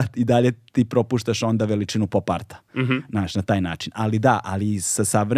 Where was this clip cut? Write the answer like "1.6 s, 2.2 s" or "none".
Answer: none